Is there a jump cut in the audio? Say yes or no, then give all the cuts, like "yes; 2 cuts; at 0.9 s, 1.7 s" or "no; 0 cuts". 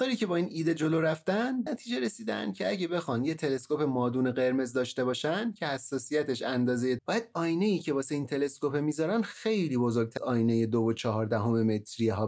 yes; 3 cuts; at 1.7 s, 7.0 s, 10.2 s